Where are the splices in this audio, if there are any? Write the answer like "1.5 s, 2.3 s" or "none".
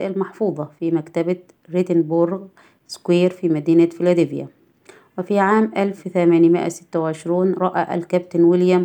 none